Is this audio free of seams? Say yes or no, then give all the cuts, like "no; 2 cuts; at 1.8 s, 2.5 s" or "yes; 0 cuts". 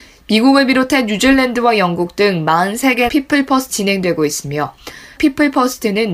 no; 3 cuts; at 3.1 s, 3.7 s, 5.2 s